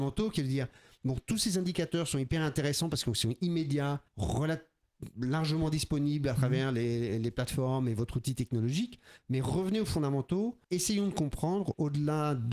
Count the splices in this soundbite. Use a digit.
2